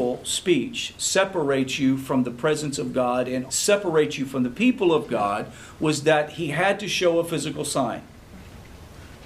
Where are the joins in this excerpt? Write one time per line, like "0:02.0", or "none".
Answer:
0:03.5